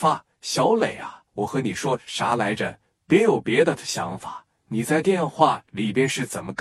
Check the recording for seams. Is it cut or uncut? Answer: cut